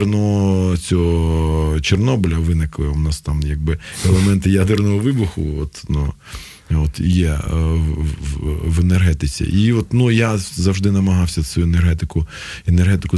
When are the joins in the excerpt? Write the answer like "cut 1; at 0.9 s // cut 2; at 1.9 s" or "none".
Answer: none

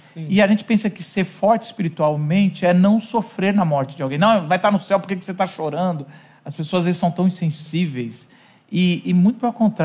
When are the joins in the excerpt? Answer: none

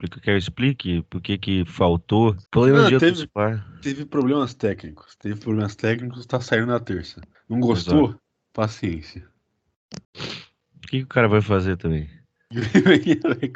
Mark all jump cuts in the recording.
cut 1; at 2.5 s // cut 2; at 7.3 s // cut 3; at 10.0 s

